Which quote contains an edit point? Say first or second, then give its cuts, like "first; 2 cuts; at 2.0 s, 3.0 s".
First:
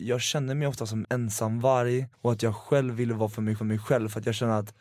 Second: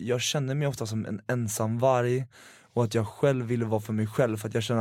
first; 3 cuts; at 1.0 s, 2.1 s, 3.6 s